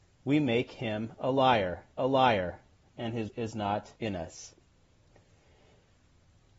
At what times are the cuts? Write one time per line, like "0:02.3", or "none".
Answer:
0:02.0
0:03.3
0:04.0